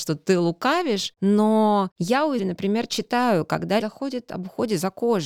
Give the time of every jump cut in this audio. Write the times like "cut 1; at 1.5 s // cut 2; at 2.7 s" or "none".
cut 1; at 2.4 s // cut 2; at 3.8 s